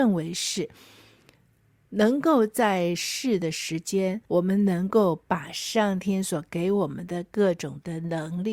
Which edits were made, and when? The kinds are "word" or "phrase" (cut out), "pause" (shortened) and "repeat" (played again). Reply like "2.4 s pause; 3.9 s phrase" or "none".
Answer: 4.2 s pause